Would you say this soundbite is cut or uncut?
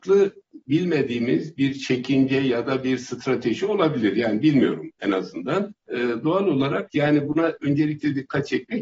cut